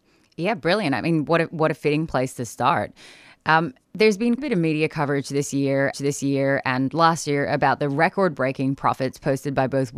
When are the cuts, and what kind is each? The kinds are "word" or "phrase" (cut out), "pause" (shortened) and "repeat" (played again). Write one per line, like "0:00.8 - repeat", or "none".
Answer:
0:03.8 - word
0:04.4 - word
0:05.9 - repeat